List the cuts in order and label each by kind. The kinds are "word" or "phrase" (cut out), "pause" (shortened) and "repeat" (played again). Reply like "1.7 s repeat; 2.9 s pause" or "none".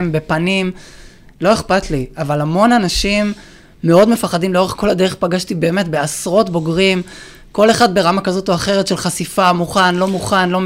none